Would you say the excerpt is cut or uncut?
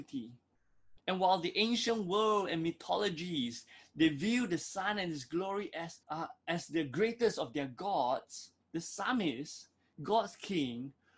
cut